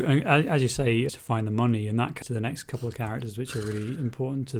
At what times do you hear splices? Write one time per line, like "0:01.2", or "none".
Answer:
0:01.1
0:02.2